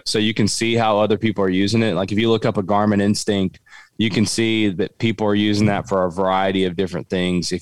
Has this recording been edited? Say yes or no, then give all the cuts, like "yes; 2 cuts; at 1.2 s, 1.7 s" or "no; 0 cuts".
no; 0 cuts